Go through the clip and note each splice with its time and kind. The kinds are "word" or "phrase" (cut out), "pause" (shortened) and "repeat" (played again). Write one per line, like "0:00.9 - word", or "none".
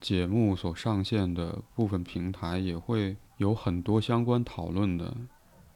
0:03.3 - pause